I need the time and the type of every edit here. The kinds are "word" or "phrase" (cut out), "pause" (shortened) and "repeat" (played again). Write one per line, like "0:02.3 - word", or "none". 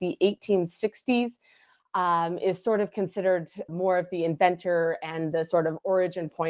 0:03.7 - word